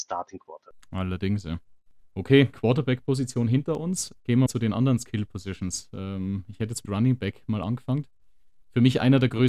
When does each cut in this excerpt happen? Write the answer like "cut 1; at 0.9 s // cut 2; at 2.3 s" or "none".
cut 1; at 2.5 s // cut 2; at 4.5 s // cut 3; at 6.9 s